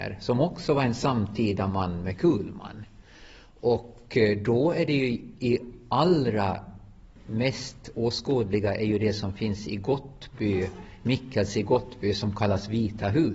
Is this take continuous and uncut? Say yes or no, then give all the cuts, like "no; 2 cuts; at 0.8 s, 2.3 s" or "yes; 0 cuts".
yes; 0 cuts